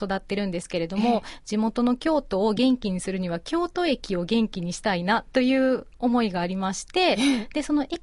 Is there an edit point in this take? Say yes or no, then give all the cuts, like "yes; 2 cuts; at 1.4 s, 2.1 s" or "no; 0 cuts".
no; 0 cuts